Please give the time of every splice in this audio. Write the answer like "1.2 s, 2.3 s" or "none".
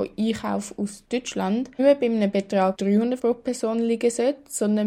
1.8 s, 2.7 s, 3.2 s